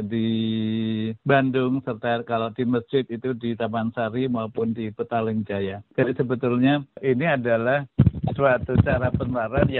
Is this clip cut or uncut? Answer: uncut